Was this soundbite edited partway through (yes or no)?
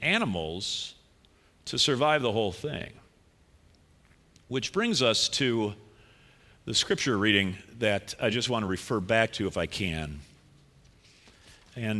no